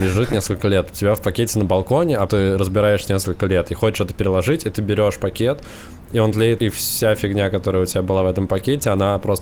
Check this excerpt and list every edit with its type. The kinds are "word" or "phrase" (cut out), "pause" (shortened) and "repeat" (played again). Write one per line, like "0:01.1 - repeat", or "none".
0:02.3 - word
0:03.1 - phrase
0:06.6 - phrase